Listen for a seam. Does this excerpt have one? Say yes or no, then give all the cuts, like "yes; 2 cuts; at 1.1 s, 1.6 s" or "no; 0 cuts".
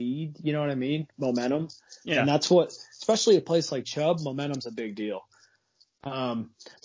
no; 0 cuts